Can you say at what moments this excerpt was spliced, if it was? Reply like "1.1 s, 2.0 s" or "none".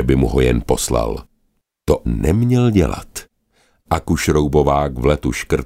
2.0 s